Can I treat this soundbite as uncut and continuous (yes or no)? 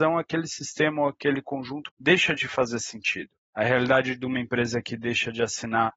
yes